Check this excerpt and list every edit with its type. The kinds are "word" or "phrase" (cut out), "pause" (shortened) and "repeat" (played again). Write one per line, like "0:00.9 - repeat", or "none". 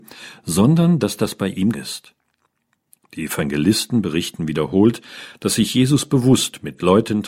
0:01.7 - phrase